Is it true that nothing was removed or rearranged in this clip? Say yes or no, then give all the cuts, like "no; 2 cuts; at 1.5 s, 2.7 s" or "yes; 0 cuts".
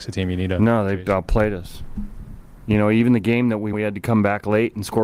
no; 1 cut; at 3.7 s